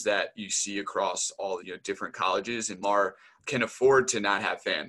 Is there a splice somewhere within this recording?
yes; 3 cuts; at 1.6 s, 2.8 s, 3.4 s

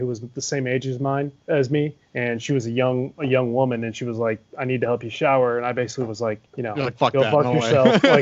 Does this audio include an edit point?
yes; 2 cuts; at 2.1 s, 6.5 s

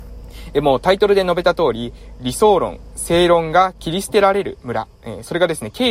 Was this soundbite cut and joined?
yes; 1 cut; at 4.9 s

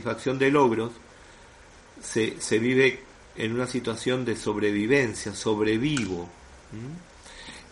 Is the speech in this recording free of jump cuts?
yes; 0 cuts

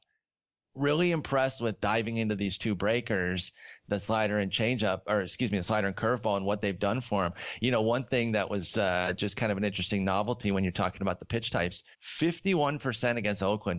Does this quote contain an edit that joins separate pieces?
yes; 1 cut; at 11.9 s

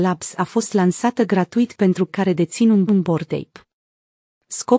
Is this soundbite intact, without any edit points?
no; 2 cuts; at 2.1 s, 2.9 s

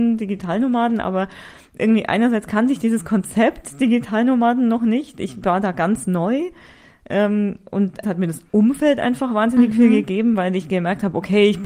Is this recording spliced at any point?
yes; 1 cut; at 8.0 s

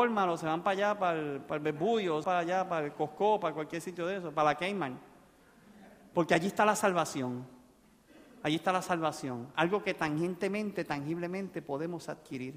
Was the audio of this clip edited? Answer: yes; 1 cut; at 2.2 s

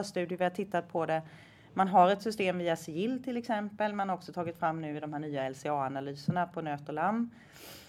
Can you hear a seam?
no; 0 cuts

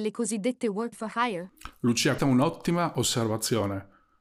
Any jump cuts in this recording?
yes; 2 cuts; at 0.9 s, 2.2 s

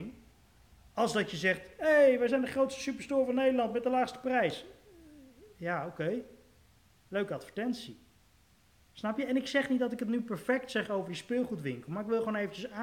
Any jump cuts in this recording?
no; 0 cuts

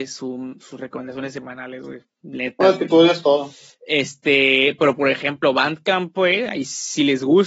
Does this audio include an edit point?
no; 0 cuts

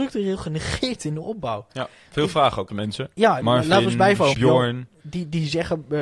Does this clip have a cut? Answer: yes; 3 cuts; at 2.7 s, 3.4 s, 4.3 s

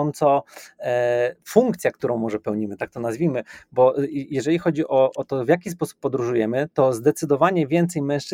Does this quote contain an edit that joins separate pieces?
no; 0 cuts

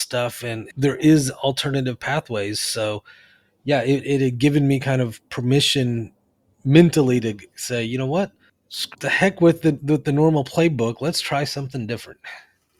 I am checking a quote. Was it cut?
no; 0 cuts

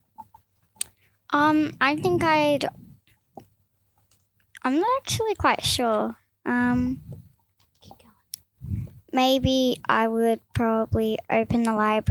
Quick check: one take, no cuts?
yes; 0 cuts

